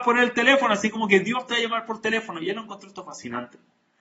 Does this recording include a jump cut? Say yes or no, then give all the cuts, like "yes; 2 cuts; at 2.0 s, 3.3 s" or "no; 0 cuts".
no; 0 cuts